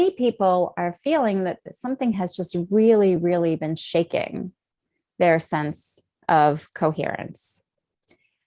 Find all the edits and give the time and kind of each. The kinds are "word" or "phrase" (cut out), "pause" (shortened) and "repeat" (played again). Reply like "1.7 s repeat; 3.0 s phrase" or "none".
none